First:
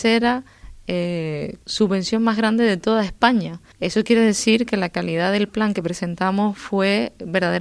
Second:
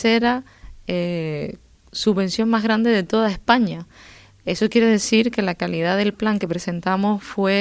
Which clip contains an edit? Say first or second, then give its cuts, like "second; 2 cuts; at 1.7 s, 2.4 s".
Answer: first; 2 cuts; at 1.6 s, 3.7 s